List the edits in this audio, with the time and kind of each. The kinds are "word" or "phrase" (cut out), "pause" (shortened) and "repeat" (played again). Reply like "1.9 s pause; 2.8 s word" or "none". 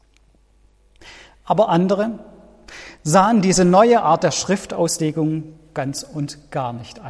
none